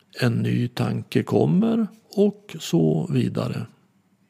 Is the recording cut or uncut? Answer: uncut